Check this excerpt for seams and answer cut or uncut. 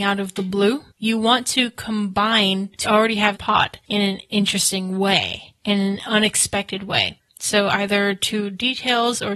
cut